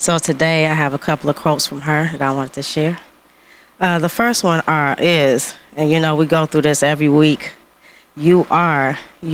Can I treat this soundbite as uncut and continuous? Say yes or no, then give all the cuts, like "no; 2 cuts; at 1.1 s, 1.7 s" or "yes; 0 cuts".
yes; 0 cuts